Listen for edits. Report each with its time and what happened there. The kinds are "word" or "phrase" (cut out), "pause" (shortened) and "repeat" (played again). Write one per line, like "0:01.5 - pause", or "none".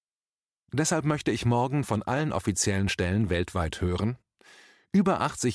none